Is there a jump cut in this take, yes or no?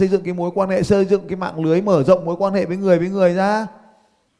no